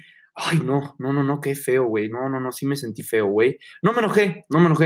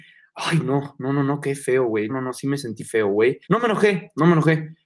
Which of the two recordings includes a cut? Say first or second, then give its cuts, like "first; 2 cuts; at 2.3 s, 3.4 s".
second; 2 cuts; at 2.1 s, 3.4 s